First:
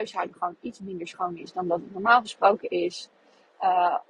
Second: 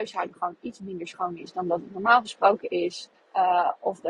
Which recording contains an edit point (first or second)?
second